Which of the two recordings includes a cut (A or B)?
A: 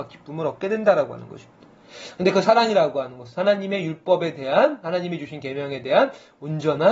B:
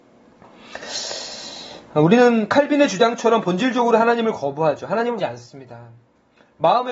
B